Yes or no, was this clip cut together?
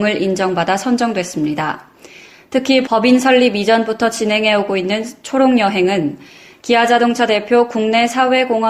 no